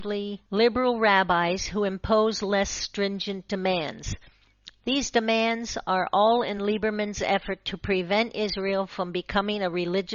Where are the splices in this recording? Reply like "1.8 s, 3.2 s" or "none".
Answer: none